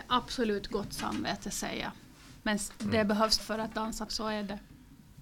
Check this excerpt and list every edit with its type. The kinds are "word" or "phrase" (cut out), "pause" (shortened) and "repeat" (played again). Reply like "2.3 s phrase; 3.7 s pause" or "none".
2.8 s word; 3.4 s word; 4.1 s word

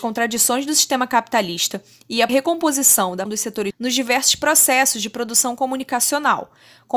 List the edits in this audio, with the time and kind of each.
2.3 s word; 3.3 s word; 3.7 s word

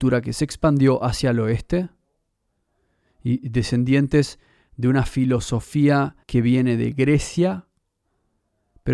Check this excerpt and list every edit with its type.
6.2 s pause

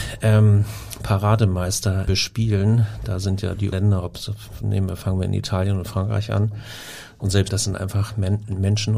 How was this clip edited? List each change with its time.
2.1 s word; 3.7 s word; 7.5 s word

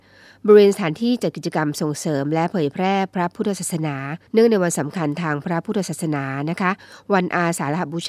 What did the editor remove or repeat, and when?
4.3 s pause

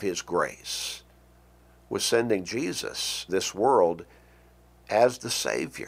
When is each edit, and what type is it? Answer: 3.3 s word

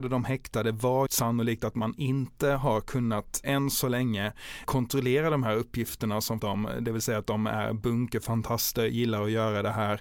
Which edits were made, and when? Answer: 1.1 s word; 3.4 s word; 4.6 s word; 6.4 s phrase

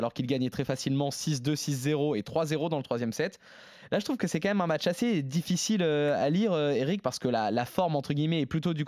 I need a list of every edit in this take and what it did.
none

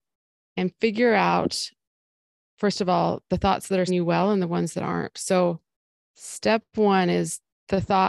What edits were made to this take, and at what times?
3.9 s word

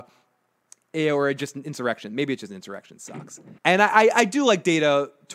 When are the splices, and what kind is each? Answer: 3.6 s pause

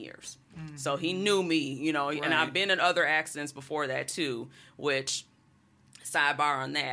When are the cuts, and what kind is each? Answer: none

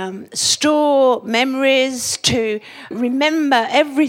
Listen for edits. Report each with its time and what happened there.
2.9 s word

